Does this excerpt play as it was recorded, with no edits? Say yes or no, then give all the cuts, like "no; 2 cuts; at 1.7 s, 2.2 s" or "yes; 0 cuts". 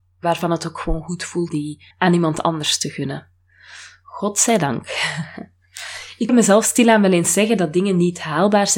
no; 3 cuts; at 1.5 s, 1.9 s, 6.3 s